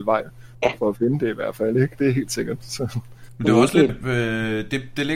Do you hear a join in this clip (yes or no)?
yes